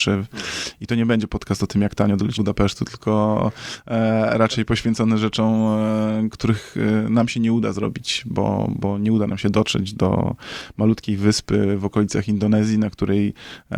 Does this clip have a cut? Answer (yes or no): yes